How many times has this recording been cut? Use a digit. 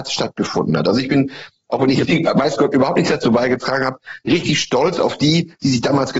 0